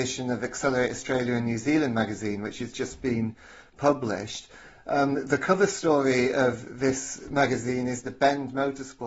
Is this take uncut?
yes; 0 cuts

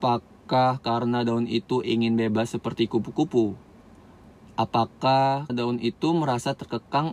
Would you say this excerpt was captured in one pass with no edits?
no; 1 cut; at 5.5 s

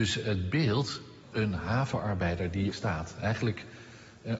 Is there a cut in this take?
yes; 2 cuts; at 1.2 s, 2.7 s

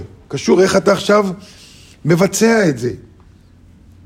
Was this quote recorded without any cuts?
yes; 0 cuts

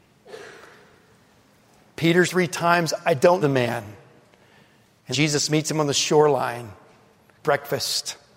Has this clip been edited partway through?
yes; 4 cuts; at 2.3 s, 3.4 s, 5.1 s, 7.4 s

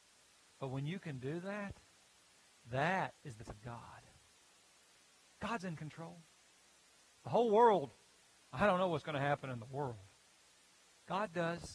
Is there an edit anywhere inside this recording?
yes; 1 cut; at 3.5 s

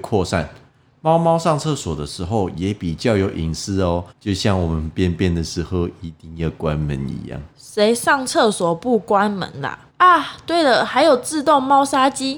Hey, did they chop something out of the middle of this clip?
yes; 3 cuts; at 4.1 s, 7.5 s, 9.9 s

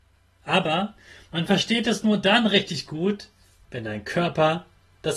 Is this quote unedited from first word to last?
yes; 0 cuts

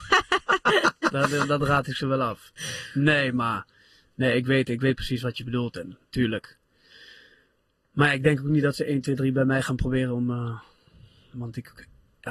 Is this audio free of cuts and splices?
yes; 0 cuts

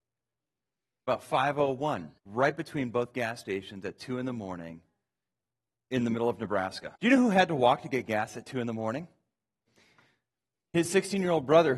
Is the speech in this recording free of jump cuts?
no; 2 cuts; at 2.2 s, 7.0 s

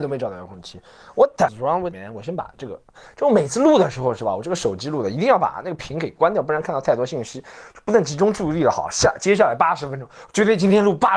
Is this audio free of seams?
no; 2 cuts; at 1.5 s, 1.9 s

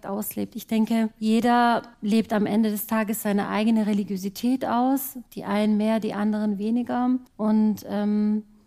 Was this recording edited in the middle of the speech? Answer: yes; 3 cuts; at 1.9 s, 5.3 s, 7.3 s

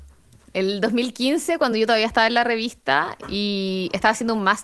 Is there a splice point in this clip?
no; 0 cuts

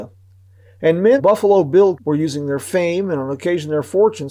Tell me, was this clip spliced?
yes; 2 cuts; at 1.2 s, 2.0 s

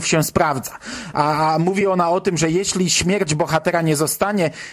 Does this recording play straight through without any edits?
yes; 0 cuts

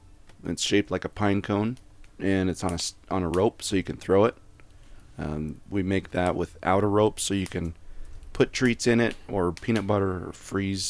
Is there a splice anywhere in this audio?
no; 0 cuts

